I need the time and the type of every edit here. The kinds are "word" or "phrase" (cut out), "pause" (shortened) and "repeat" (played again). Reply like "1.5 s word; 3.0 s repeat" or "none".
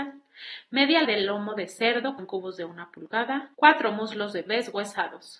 1.0 s word; 2.2 s word; 3.5 s pause; 4.5 s word